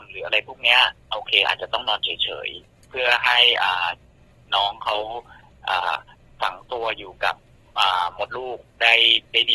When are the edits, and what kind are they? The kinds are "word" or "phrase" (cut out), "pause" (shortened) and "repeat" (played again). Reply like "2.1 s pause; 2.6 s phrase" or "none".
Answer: 6.1 s pause